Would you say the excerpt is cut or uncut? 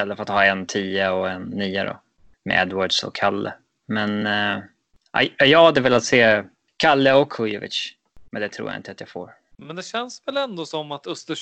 uncut